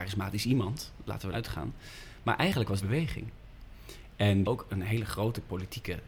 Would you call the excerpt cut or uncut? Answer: cut